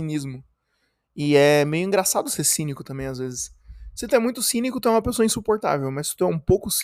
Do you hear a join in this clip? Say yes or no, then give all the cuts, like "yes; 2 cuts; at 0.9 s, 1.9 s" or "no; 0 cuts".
no; 0 cuts